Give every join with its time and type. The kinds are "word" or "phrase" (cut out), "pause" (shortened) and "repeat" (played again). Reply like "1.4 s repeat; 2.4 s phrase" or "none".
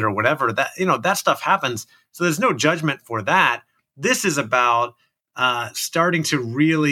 none